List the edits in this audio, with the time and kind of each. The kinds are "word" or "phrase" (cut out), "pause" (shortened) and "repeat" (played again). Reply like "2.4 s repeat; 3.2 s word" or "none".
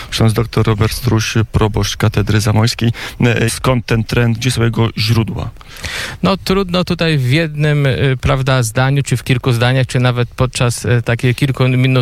3.5 s phrase